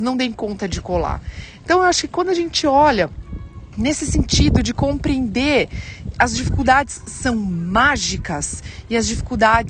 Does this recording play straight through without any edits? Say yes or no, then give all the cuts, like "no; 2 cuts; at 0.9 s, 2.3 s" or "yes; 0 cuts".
no; 1 cut; at 6.1 s